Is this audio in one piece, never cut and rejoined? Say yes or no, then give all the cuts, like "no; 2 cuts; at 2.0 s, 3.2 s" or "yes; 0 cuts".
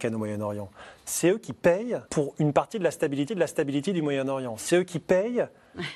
no; 2 cuts; at 2.1 s, 3.3 s